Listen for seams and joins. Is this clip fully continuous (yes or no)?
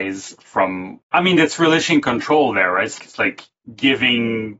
no